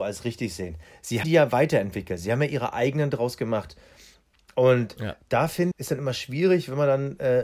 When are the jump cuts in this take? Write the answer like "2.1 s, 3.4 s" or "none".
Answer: 1.2 s, 5.7 s